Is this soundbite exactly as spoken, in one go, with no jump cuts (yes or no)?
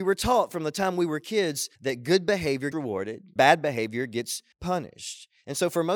no